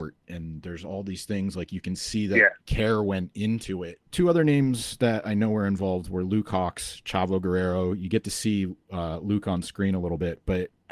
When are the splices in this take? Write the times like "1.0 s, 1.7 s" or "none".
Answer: 4.1 s